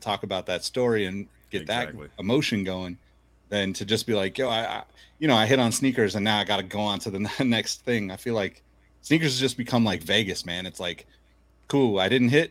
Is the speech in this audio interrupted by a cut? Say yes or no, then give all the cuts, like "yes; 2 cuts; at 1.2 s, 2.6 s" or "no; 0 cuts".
no; 0 cuts